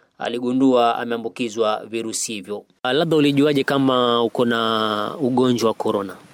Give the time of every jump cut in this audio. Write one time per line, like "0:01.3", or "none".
none